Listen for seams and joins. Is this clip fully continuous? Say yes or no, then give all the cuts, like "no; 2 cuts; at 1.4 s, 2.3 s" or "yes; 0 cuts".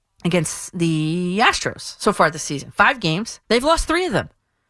no; 1 cut; at 3.4 s